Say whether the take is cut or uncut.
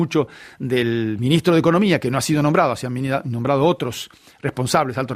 uncut